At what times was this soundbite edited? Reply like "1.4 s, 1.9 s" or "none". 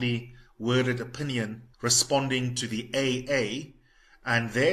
1.7 s

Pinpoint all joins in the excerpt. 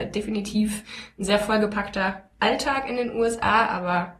none

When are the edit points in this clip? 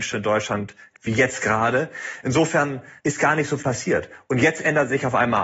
0.9 s, 3.0 s, 3.6 s

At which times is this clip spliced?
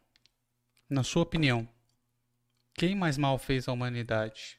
none

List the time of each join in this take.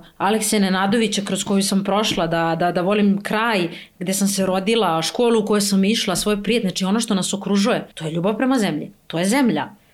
7.9 s

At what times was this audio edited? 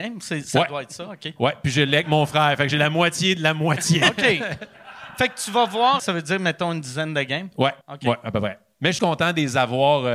6.0 s, 7.8 s, 9.0 s

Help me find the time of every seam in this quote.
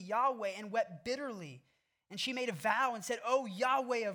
none

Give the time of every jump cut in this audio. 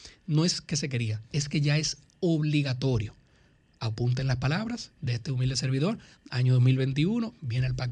none

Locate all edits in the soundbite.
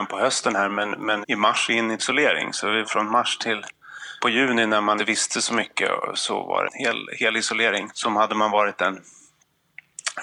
1.2 s, 1.7 s, 2.0 s, 2.8 s, 4.2 s, 5.0 s, 6.7 s, 7.9 s

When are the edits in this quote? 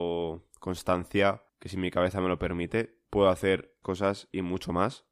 1.5 s, 3.1 s, 3.8 s

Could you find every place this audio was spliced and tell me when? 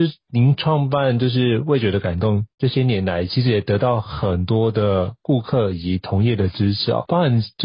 2.5 s

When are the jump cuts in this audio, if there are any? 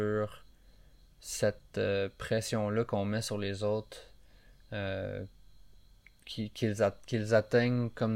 none

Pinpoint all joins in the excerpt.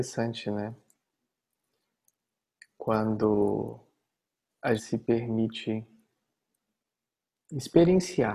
4.8 s, 7.0 s

